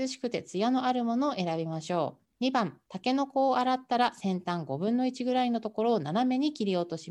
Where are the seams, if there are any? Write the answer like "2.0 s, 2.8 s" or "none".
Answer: 2.3 s, 2.9 s